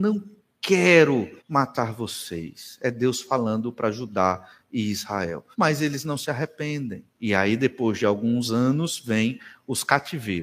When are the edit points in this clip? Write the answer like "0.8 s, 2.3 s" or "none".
1.4 s, 5.5 s, 7.1 s